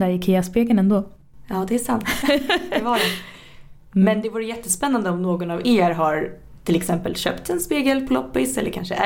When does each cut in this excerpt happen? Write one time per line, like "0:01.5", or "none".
none